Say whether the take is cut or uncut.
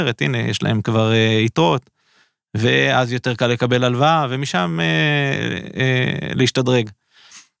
uncut